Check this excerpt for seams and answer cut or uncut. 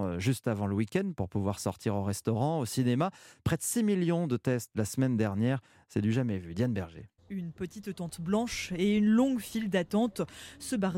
cut